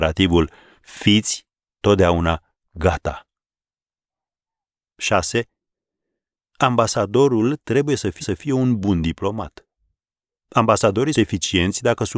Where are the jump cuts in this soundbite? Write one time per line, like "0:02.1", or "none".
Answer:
0:08.2
0:11.1